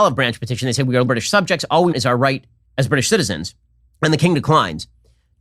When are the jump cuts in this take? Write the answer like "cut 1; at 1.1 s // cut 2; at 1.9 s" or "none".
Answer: cut 1; at 1.1 s // cut 2; at 1.9 s